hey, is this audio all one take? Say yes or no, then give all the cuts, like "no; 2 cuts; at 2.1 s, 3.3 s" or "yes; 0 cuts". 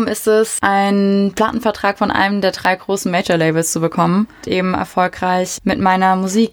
no; 1 cut; at 4.4 s